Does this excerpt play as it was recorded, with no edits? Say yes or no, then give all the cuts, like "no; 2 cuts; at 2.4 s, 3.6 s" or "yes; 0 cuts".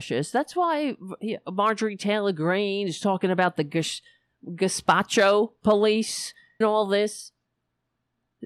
no; 1 cut; at 6.6 s